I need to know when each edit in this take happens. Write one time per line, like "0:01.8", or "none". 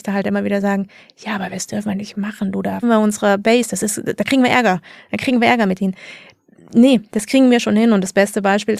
0:02.8